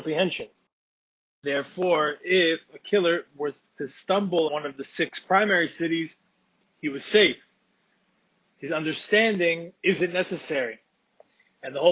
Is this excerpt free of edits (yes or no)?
no